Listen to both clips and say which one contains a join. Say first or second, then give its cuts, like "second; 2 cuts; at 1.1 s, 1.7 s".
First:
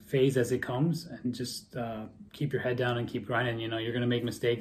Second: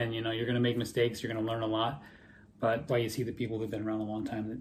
second; 1 cut; at 2.9 s